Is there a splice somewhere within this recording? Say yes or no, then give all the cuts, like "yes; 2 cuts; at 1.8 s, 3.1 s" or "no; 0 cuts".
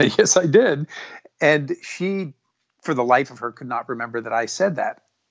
no; 0 cuts